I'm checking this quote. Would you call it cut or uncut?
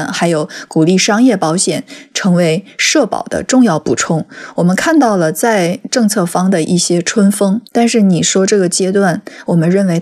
cut